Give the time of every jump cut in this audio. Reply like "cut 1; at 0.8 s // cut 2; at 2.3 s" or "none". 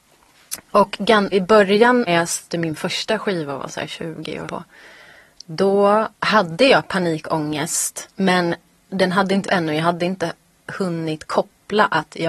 cut 1; at 1.3 s // cut 2; at 2.1 s // cut 3; at 2.5 s // cut 4; at 4.4 s // cut 5; at 6.1 s // cut 6; at 8.1 s // cut 7; at 9.4 s